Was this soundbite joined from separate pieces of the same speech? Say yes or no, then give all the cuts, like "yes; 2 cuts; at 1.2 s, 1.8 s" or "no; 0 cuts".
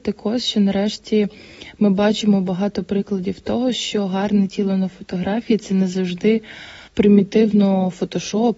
yes; 1 cut; at 6.9 s